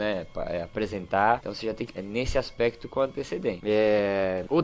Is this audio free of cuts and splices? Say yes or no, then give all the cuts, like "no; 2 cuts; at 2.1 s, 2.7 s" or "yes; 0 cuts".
no; 1 cut; at 1.9 s